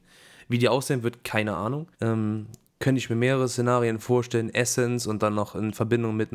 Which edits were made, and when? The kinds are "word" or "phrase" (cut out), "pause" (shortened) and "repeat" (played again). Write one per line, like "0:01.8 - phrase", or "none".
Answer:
0:01.9 - pause